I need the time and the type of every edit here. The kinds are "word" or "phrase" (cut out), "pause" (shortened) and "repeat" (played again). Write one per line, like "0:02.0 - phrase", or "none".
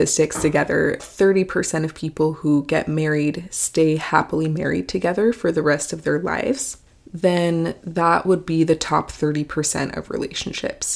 0:01.0 - phrase
0:06.9 - pause